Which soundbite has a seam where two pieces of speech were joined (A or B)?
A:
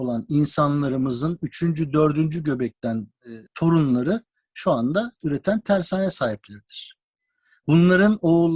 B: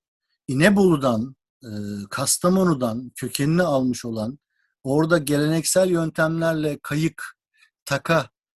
A